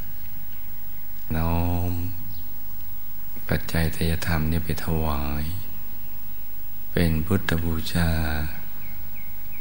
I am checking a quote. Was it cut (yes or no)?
no